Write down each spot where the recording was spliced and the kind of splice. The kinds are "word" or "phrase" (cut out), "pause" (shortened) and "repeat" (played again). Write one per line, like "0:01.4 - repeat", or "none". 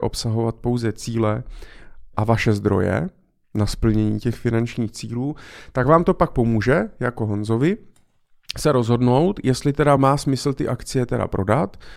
none